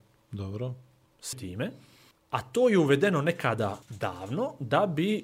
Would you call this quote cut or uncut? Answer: cut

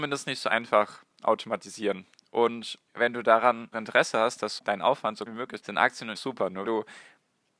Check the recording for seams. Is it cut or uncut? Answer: cut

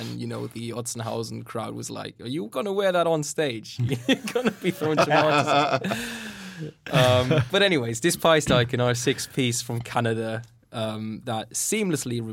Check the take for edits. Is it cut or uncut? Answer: uncut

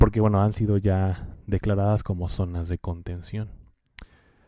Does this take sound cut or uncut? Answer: uncut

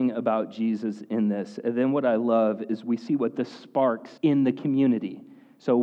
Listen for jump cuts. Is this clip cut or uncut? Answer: cut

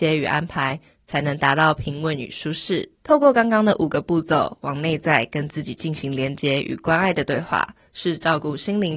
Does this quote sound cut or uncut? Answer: cut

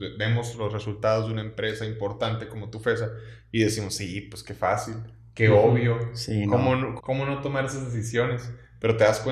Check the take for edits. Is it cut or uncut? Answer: cut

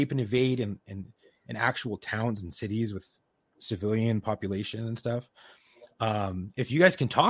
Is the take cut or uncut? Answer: uncut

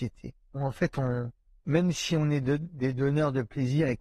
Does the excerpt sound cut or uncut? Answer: uncut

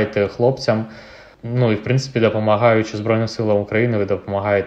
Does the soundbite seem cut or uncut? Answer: uncut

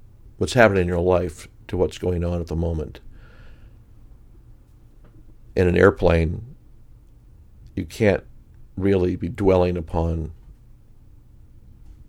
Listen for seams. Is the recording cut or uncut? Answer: uncut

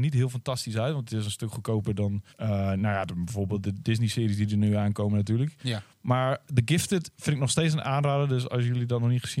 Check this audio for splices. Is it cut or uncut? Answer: cut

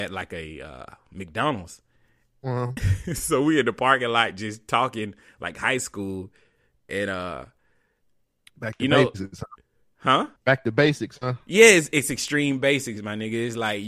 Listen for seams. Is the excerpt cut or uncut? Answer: cut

